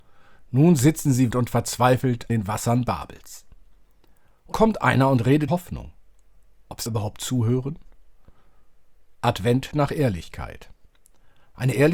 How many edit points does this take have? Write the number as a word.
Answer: six